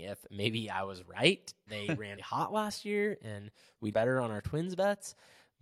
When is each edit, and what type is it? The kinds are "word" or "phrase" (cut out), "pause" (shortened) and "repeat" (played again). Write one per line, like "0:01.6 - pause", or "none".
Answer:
0:01.7 - phrase
0:02.2 - word
0:03.9 - word